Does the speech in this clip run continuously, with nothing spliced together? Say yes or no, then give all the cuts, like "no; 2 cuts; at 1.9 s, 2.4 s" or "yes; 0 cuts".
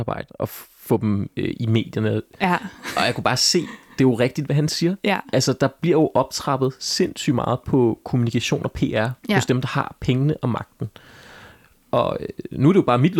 yes; 0 cuts